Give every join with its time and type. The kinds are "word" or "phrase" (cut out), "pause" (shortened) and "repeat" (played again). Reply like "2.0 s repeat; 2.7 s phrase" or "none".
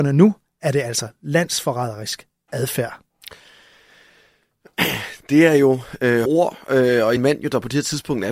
6.3 s word; 7.2 s phrase

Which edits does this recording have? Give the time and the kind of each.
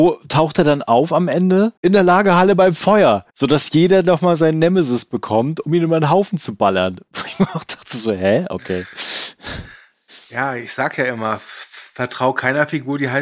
1.8 s pause; 3.3 s pause

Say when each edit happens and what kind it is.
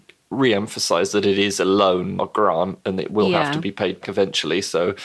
2.2 s word; 4.0 s word

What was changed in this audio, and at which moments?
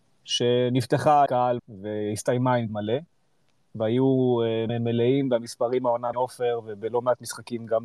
1.3 s word; 1.6 s word; 2.7 s word; 4.7 s word; 6.1 s word

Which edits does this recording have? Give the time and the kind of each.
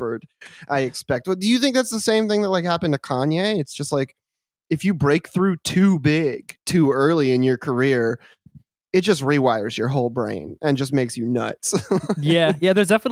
6.6 s pause

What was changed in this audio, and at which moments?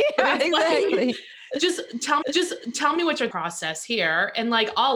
2.2 s repeat; 3.3 s word

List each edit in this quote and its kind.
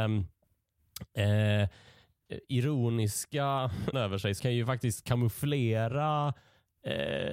3.9 s word; 4.4 s word

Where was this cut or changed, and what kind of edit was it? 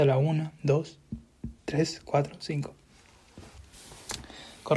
1.6 s pause

